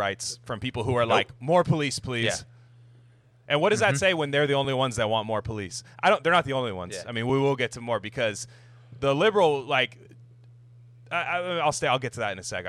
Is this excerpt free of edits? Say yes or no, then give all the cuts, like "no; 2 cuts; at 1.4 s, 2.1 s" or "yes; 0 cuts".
yes; 0 cuts